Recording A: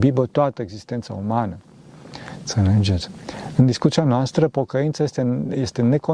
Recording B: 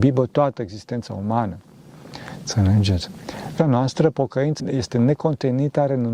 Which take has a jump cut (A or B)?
B